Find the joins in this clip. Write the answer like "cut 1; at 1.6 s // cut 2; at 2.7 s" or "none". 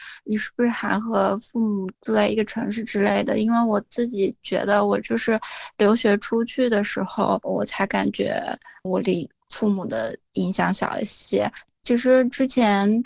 cut 1; at 8.8 s

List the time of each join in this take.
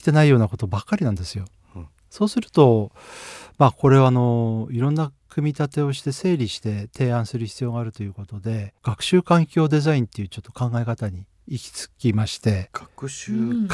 cut 1; at 8.8 s // cut 2; at 11.9 s

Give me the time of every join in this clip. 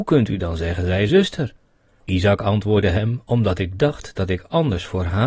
cut 1; at 1.1 s

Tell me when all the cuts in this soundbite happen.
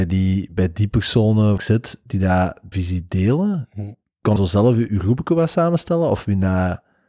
cut 1; at 1.6 s // cut 2; at 2.7 s // cut 3; at 4.4 s // cut 4; at 4.9 s

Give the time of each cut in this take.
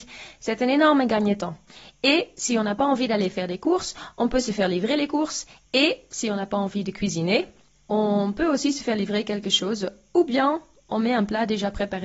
none

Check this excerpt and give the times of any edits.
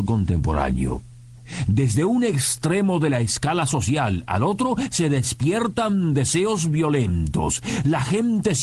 none

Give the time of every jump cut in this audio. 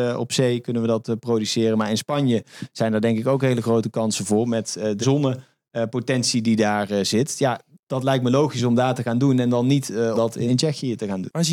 cut 1; at 5.0 s // cut 2; at 7.8 s // cut 3; at 10.1 s // cut 4; at 10.5 s

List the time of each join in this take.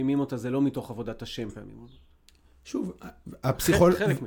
none

